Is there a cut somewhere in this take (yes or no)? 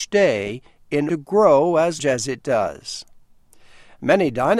yes